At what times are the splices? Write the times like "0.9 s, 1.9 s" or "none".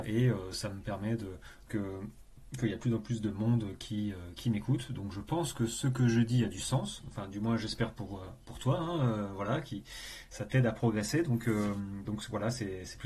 1.7 s